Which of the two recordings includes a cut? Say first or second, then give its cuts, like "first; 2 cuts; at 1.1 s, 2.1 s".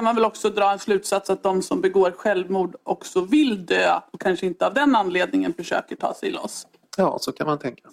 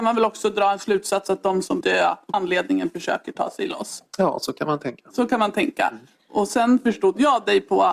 second; 3 cuts; at 1.8 s, 2.3 s, 4.1 s